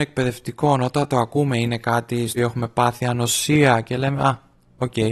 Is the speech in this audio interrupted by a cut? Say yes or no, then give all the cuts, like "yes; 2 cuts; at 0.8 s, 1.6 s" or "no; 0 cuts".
yes; 1 cut; at 2.4 s